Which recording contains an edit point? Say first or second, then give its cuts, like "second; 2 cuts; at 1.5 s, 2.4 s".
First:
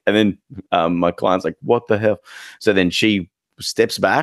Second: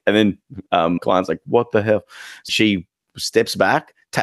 second; 2 cuts; at 1.0 s, 2.5 s